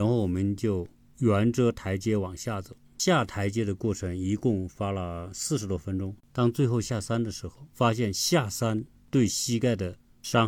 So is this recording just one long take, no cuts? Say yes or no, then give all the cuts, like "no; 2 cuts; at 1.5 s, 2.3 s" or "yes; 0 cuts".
yes; 0 cuts